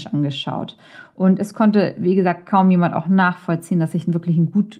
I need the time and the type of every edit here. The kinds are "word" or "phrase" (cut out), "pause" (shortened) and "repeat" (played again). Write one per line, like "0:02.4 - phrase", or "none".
none